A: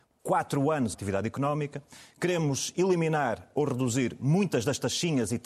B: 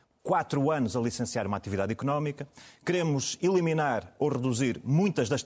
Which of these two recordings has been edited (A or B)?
A